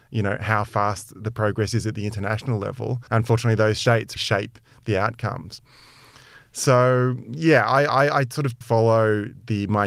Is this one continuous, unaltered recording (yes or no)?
no